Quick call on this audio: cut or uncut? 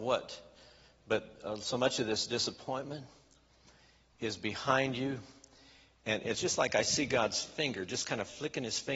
uncut